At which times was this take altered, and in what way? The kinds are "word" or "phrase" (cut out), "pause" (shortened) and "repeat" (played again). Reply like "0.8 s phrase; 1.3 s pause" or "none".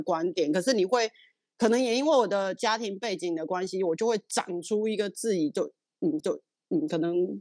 6.2 s repeat